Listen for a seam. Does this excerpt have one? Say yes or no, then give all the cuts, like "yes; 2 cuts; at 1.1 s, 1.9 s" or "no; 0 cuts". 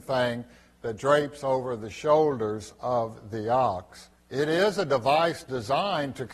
yes; 1 cut; at 4.2 s